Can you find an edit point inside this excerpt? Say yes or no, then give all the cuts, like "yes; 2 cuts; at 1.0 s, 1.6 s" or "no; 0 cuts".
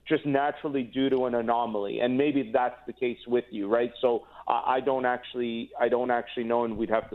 no; 0 cuts